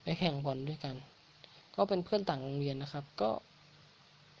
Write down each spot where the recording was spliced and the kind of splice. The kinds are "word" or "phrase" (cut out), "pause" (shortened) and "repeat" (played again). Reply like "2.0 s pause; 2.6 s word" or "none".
3.1 s pause